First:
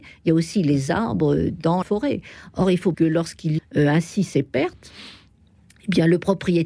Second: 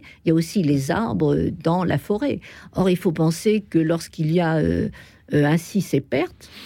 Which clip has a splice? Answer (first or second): first